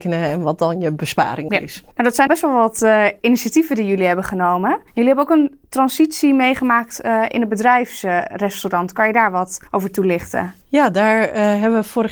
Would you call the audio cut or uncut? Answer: cut